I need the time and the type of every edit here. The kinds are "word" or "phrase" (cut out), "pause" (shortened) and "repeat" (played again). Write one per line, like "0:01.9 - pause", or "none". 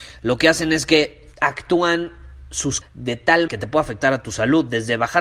0:01.3 - pause
0:02.8 - word
0:03.5 - word